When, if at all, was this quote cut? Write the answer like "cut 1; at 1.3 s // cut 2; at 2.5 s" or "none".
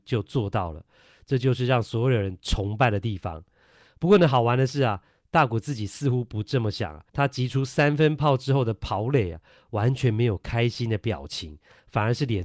cut 1; at 7.1 s